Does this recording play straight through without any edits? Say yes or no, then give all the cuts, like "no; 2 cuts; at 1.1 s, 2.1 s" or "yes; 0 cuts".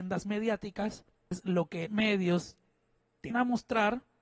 no; 3 cuts; at 1.3 s, 1.9 s, 3.3 s